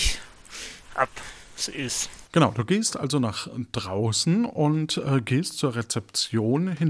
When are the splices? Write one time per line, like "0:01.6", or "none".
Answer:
0:02.3